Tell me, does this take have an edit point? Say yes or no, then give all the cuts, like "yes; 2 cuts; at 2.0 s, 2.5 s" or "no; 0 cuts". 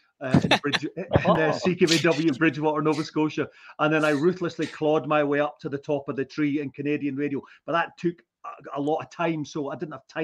no; 0 cuts